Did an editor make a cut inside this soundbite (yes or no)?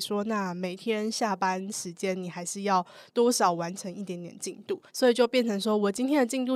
yes